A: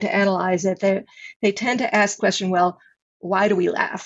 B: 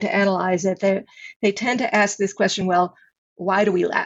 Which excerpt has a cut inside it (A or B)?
A